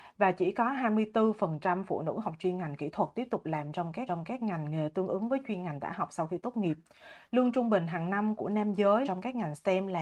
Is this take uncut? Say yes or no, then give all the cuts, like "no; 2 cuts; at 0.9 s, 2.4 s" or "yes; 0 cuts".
no; 2 cuts; at 4.1 s, 9.0 s